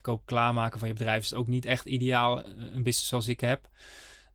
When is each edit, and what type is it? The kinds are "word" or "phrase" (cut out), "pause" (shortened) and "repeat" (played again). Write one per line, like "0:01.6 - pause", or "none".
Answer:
none